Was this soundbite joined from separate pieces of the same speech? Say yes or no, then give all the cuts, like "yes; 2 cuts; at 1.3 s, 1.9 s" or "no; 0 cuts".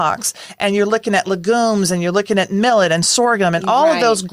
no; 0 cuts